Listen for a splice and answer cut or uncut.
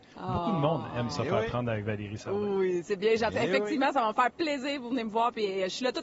uncut